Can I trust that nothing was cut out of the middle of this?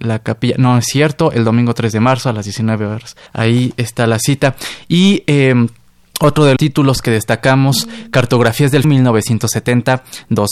no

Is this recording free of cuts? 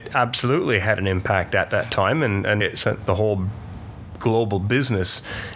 no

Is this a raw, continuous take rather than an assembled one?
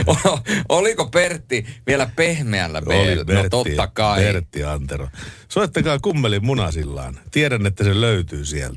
yes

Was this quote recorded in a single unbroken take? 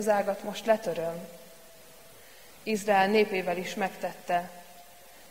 yes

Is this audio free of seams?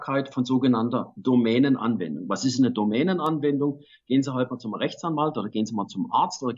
yes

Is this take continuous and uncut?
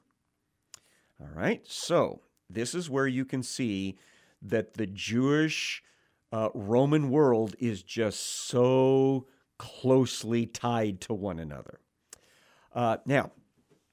yes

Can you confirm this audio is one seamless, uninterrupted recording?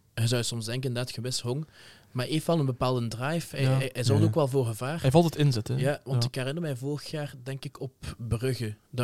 yes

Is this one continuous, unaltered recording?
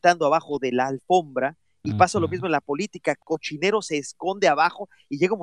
yes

